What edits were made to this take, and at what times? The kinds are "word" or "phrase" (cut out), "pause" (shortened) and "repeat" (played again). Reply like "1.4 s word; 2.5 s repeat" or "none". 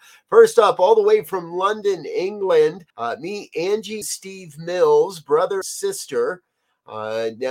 2.9 s pause; 4.0 s word; 5.6 s word